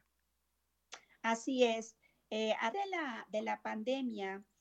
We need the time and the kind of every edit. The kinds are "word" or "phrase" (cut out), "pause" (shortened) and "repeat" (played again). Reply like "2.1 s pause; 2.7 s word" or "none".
2.7 s word